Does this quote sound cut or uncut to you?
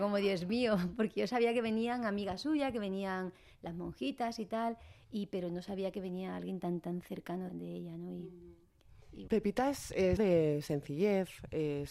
cut